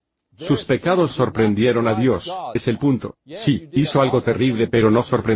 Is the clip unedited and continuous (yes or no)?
no